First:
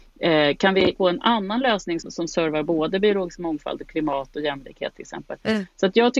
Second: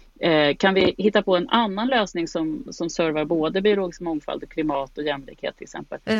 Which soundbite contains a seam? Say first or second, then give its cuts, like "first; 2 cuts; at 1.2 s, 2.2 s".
first; 2 cuts; at 1.0 s, 2.0 s